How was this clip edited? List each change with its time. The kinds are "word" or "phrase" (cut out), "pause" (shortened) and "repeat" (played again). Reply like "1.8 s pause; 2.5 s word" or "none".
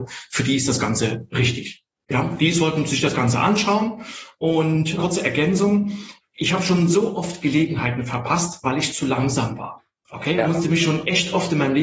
5.0 s phrase